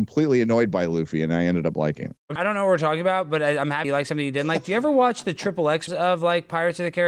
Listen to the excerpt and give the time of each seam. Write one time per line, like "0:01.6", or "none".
0:02.4
0:03.8
0:05.9